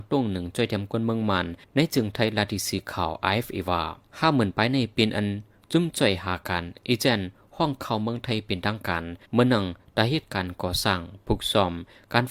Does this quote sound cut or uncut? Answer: cut